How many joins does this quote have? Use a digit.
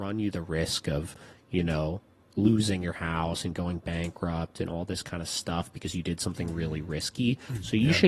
1